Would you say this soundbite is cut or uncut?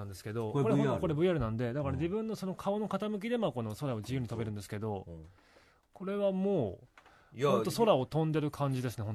uncut